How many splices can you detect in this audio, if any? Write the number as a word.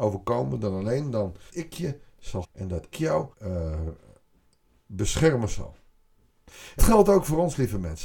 five